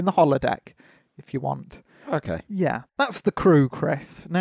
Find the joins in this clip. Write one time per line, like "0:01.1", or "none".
0:02.9